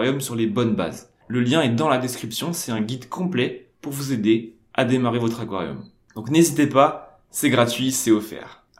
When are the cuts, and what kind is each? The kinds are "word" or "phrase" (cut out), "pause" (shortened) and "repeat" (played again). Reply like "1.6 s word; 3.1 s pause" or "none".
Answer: none